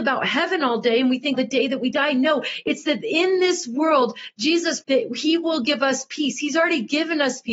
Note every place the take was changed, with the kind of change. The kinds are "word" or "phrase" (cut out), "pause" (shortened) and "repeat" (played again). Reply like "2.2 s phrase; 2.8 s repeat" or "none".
1.3 s word; 4.8 s word